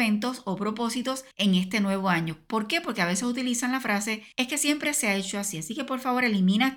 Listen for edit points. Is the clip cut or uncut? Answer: cut